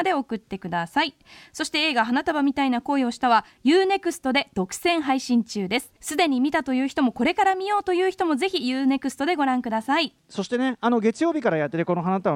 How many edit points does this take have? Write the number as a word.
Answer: one